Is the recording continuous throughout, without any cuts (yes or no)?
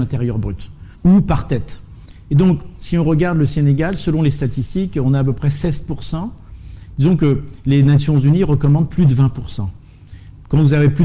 no